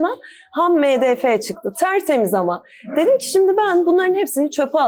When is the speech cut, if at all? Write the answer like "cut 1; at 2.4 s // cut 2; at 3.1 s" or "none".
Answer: none